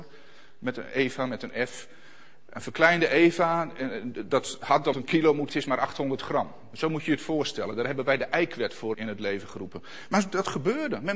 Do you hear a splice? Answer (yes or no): yes